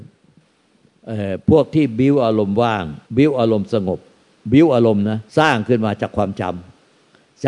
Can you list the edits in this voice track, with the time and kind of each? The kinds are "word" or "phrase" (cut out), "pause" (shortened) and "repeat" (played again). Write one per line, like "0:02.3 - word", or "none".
0:03.1 - pause
0:05.3 - pause